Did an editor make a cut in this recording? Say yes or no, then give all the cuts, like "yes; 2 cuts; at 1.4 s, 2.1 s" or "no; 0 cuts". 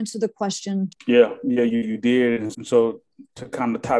yes; 3 cuts; at 1.0 s, 1.8 s, 2.5 s